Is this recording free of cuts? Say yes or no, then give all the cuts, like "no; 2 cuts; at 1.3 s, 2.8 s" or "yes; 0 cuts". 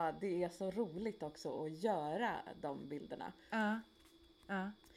yes; 0 cuts